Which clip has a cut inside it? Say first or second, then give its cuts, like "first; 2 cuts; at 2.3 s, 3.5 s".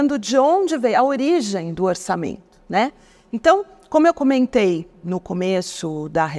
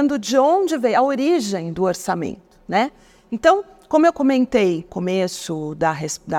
second; 1 cut; at 4.9 s